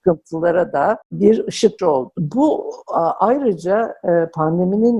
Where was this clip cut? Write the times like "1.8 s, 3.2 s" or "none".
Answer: 1.0 s, 1.8 s